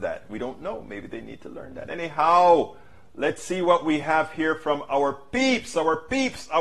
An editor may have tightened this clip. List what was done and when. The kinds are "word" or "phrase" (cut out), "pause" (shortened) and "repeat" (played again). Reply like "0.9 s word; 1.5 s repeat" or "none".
none